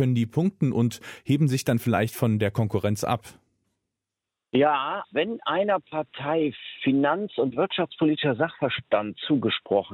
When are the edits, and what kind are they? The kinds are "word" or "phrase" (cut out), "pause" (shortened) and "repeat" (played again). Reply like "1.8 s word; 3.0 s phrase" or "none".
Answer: 5.0 s word